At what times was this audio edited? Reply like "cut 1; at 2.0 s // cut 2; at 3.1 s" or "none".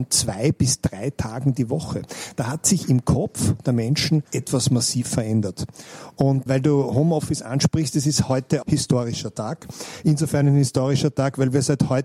cut 1; at 4.3 s // cut 2; at 6.5 s // cut 3; at 8.6 s